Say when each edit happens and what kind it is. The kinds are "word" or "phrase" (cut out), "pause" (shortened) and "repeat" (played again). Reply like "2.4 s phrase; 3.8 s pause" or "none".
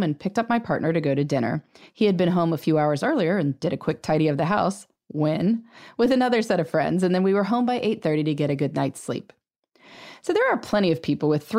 none